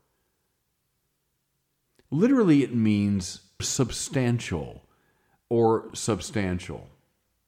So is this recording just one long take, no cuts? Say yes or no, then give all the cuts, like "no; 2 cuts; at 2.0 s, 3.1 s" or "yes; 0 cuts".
no; 2 cuts; at 3.6 s, 5.9 s